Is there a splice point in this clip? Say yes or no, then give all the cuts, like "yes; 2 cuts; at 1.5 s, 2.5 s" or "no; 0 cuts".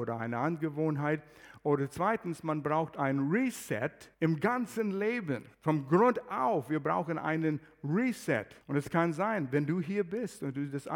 yes; 3 cuts; at 4.1 s, 5.5 s, 8.6 s